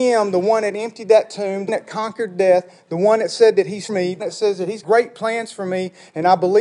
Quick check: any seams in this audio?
yes; 4 cuts; at 1.7 s, 3.9 s, 4.2 s, 4.8 s

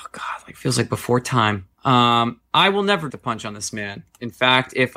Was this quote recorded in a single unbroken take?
no; 2 cuts; at 1.7 s, 3.1 s

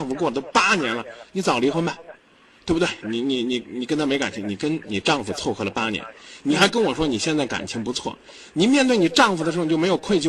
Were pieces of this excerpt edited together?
no; 0 cuts

